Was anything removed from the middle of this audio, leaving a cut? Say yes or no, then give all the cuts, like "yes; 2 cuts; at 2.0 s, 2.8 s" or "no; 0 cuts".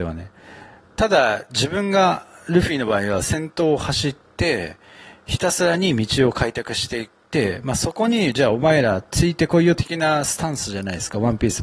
no; 0 cuts